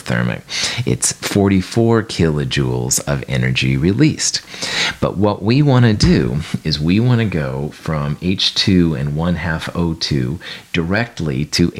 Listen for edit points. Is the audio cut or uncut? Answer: uncut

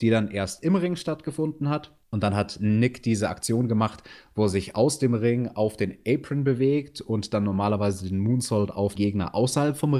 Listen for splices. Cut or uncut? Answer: cut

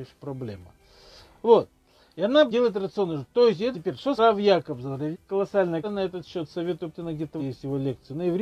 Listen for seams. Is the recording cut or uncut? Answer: cut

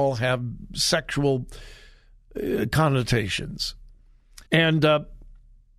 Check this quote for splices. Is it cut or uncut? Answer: cut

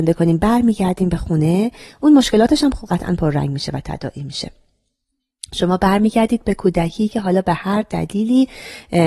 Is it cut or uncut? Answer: uncut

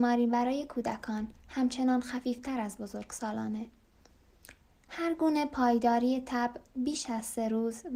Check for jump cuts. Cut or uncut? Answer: cut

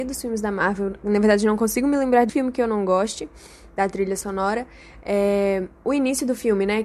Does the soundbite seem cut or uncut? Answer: cut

